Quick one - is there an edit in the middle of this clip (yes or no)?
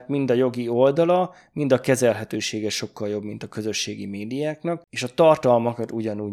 no